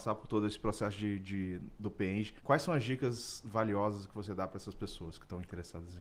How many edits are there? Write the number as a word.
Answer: one